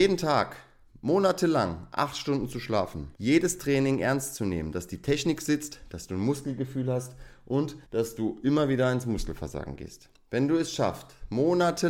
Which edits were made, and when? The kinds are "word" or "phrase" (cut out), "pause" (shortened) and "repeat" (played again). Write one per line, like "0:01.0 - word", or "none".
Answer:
0:03.2 - pause
0:07.9 - pause